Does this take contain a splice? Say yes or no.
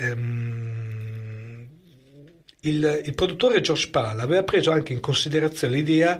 no